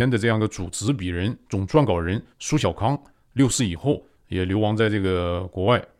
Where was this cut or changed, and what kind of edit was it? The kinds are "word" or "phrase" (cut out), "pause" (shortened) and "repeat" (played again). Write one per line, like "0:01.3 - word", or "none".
none